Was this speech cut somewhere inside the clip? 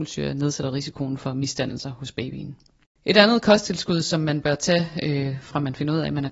no; 0 cuts

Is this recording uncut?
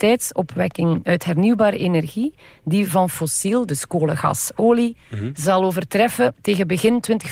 yes; 0 cuts

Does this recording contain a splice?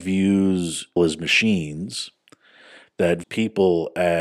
yes; 2 cuts; at 1.0 s, 3.2 s

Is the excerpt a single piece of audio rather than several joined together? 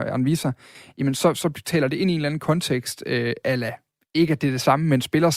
yes; 0 cuts

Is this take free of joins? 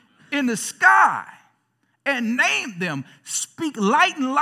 yes; 0 cuts

